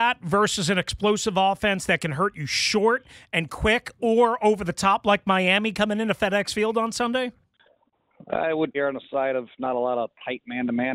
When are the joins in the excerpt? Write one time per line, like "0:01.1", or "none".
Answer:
0:08.7